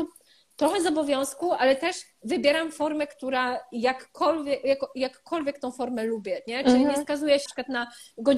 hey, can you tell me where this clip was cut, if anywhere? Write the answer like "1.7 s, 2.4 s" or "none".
7.5 s